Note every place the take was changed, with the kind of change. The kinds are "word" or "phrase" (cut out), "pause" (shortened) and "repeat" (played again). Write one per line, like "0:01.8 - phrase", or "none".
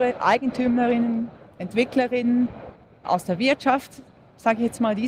0:03.0 - word